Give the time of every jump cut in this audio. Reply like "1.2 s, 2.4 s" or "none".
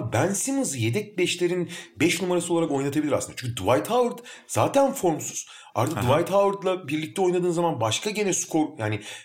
none

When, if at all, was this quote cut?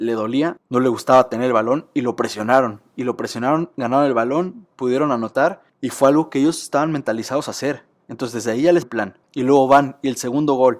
8.8 s

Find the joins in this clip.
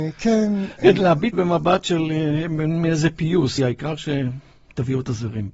1.3 s, 3.6 s

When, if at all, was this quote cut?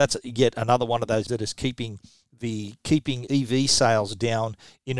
1.3 s, 3.3 s

